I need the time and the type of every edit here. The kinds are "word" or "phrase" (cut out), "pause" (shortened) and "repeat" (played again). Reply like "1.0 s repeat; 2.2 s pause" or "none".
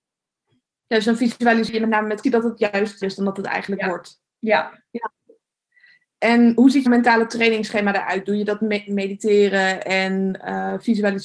2.2 s word; 3.0 s word; 4.3 s pause; 6.9 s word